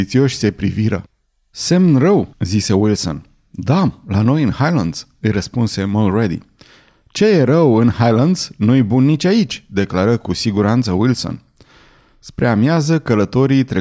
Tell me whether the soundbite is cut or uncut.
cut